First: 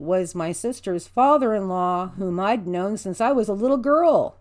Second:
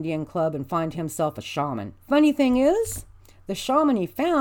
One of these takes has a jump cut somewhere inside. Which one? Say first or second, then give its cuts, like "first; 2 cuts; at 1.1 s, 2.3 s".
second; 1 cut; at 2.0 s